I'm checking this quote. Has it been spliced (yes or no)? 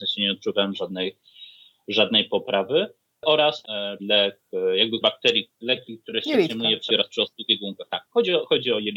yes